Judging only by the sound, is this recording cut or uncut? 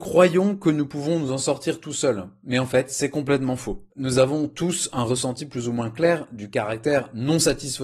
uncut